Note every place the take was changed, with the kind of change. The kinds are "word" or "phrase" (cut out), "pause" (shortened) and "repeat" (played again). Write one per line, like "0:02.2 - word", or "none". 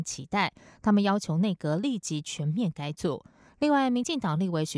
none